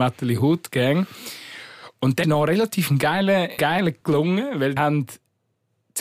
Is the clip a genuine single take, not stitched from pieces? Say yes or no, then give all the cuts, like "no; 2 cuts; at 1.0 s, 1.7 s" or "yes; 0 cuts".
no; 4 cuts; at 2.2 s, 3.6 s, 4.0 s, 4.8 s